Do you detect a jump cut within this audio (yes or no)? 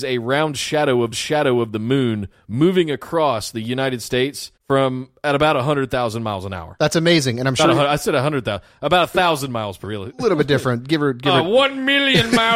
yes